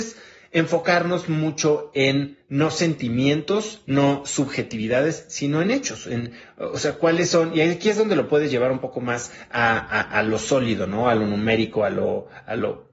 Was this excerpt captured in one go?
yes; 0 cuts

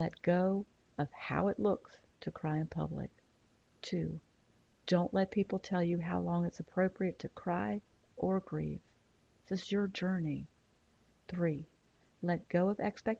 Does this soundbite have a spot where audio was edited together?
no; 0 cuts

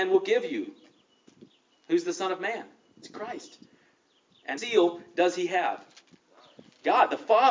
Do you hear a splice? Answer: yes; 1 cut; at 4.6 s

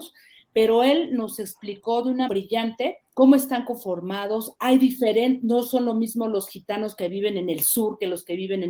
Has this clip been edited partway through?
yes; 2 cuts; at 2.3 s, 3.0 s

